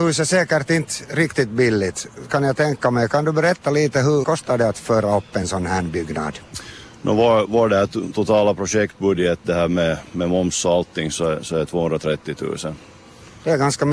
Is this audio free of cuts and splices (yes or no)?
no